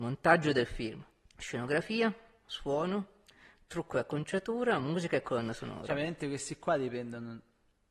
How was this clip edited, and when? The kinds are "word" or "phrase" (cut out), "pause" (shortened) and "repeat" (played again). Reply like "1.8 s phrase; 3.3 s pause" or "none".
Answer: 1.3 s pause